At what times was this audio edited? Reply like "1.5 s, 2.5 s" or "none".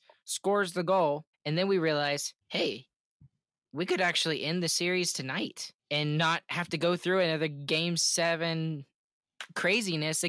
1.3 s, 2.4 s, 5.8 s